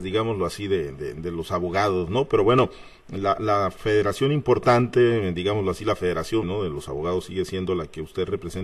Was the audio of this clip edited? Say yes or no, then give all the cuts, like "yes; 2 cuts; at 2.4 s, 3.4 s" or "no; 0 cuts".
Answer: yes; 1 cut; at 6.4 s